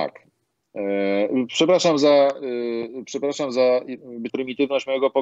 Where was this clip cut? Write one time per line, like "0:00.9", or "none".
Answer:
0:04.3